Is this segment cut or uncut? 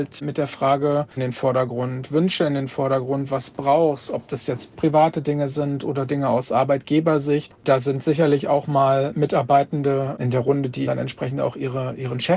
cut